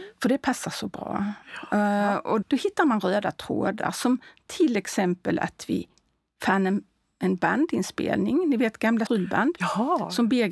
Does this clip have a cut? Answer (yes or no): yes